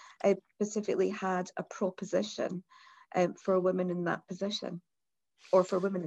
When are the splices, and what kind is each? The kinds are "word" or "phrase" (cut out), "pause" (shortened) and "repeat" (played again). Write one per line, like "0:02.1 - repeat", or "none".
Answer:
none